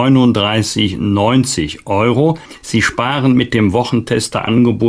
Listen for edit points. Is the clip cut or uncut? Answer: uncut